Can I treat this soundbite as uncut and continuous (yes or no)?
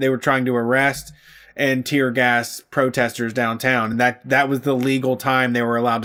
yes